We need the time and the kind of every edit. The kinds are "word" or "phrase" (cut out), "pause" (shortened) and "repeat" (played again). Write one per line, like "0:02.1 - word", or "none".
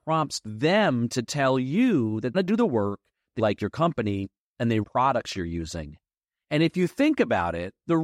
0:02.3 - phrase
0:03.4 - word
0:04.8 - phrase